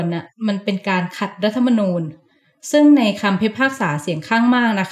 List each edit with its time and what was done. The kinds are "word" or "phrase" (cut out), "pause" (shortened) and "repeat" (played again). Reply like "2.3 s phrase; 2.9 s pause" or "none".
none